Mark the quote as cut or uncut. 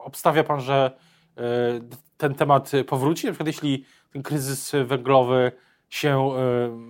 uncut